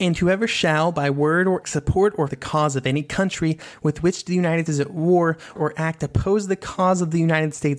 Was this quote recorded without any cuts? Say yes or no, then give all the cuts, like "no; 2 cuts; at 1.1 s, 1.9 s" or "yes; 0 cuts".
no; 4 cuts; at 1.6 s, 2.3 s, 4.7 s, 5.6 s